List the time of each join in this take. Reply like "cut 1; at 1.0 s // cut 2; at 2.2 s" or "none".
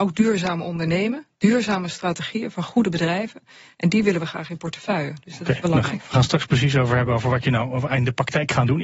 none

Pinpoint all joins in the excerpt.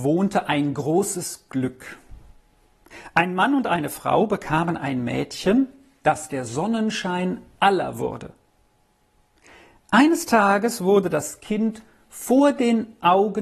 none

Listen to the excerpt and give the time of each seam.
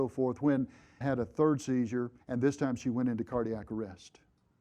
cut 1; at 1.0 s // cut 2; at 2.2 s

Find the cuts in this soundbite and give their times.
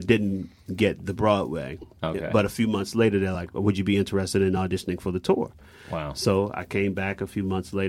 none

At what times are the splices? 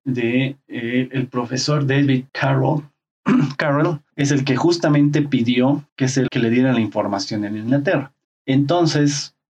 cut 1; at 2.3 s // cut 2; at 4.1 s // cut 3; at 5.9 s // cut 4; at 6.3 s // cut 5; at 8.2 s

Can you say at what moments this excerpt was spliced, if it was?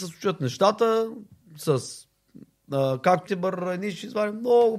cut 1; at 3.3 s

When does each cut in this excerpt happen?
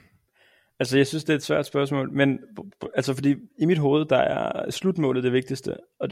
none

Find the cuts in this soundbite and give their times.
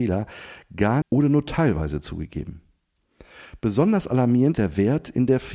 cut 1; at 1.0 s // cut 2; at 4.5 s

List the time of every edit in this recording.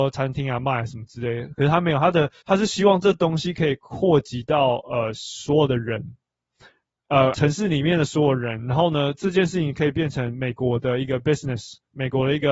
cut 1; at 2.4 s // cut 2; at 7.3 s

